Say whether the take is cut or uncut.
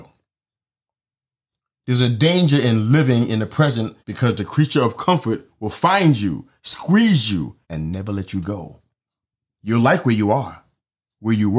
cut